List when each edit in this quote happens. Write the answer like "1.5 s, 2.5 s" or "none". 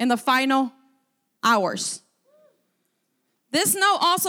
none